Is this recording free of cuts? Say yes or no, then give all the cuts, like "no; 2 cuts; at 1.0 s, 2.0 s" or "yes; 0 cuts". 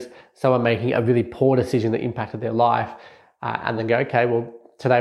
yes; 0 cuts